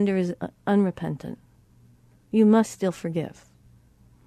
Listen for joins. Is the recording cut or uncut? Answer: uncut